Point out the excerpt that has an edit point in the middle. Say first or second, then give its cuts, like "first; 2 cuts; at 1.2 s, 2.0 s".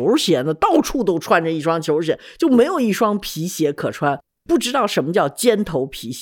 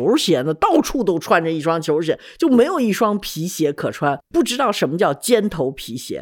second; 1 cut; at 4.2 s